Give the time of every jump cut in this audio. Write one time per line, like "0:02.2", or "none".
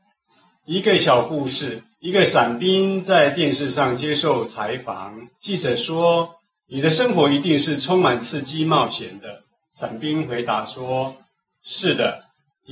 0:01.9
0:05.3
0:09.5